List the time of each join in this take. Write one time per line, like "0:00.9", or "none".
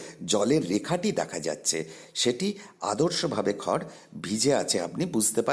none